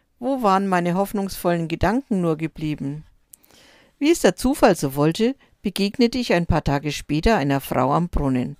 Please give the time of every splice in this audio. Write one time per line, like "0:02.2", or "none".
none

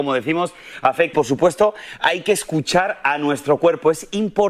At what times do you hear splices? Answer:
0:01.1

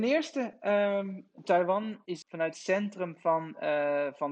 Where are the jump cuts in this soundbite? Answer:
0:02.5

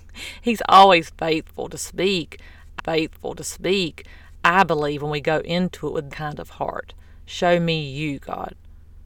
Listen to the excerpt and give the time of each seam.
0:02.8
0:06.1

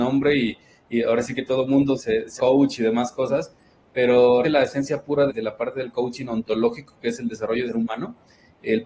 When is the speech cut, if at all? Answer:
0:02.0
0:02.4
0:04.4
0:05.3
0:07.7

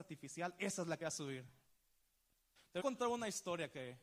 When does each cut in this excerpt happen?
0:01.0
0:02.1
0:02.8

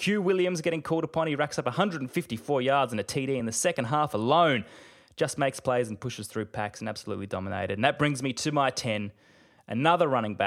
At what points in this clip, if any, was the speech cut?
none

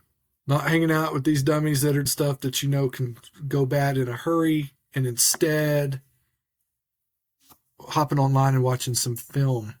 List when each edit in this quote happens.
0:02.1

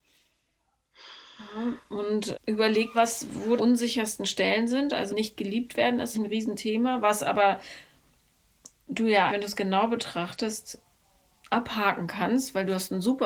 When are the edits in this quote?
0:02.3
0:02.9
0:03.6
0:05.1
0:06.1
0:09.3

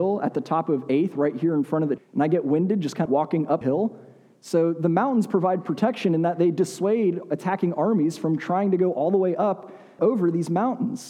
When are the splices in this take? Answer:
0:02.0
0:03.1
0:03.6
0:10.0

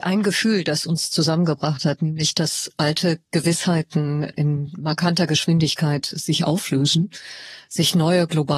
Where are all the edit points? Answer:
none

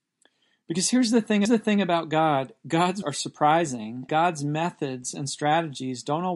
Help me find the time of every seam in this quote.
0:01.4
0:03.0
0:04.1

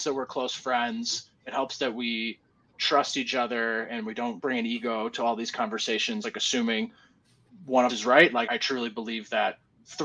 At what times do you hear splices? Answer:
0:04.4
0:06.2
0:07.9
0:08.5

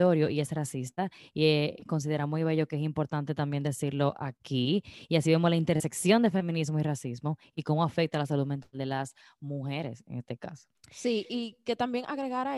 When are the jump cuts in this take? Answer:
none

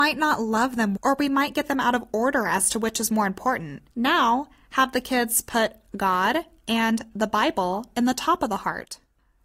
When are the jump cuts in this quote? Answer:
0:01.0
0:03.9

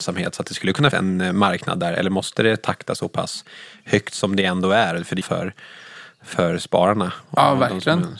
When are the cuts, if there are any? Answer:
0:00.9
0:05.2

